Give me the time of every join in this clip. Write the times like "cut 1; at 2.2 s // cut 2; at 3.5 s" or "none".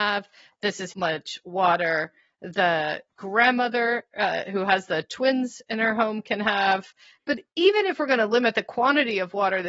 cut 1; at 0.9 s